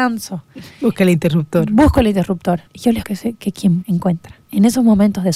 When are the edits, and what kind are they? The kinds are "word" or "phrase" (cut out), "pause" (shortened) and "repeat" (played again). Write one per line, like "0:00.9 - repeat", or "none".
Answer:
0:02.7 - pause
0:03.0 - word
0:03.8 - word
0:04.4 - pause